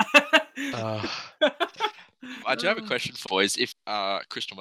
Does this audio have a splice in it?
yes; 3 cuts; at 2.4 s, 3.2 s, 3.7 s

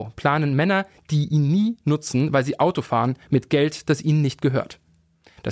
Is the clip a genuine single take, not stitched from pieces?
yes; 0 cuts

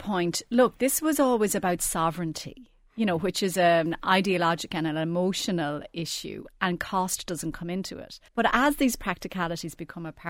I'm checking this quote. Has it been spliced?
yes; 1 cut; at 8.3 s

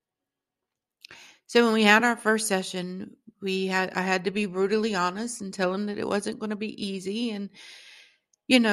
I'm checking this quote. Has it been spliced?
no; 0 cuts

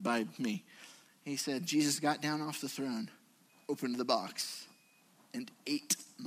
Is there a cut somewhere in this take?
no; 0 cuts

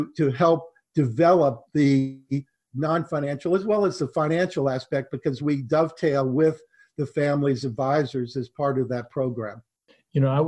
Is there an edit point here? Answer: no; 0 cuts

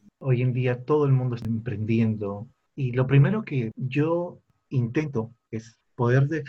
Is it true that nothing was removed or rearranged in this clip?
yes; 0 cuts

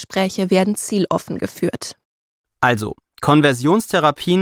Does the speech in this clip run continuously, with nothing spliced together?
yes; 0 cuts

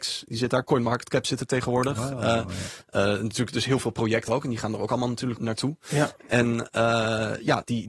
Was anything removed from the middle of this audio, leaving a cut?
yes; 2 cuts; at 4.3 s, 5.4 s

